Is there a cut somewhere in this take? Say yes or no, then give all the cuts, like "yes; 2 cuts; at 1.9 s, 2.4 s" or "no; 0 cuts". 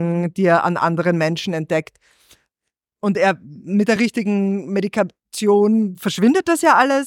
no; 0 cuts